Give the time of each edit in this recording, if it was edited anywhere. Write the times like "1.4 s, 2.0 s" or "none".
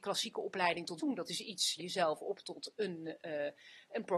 1.0 s, 1.8 s